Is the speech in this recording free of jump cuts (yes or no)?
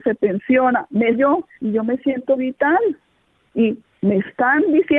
no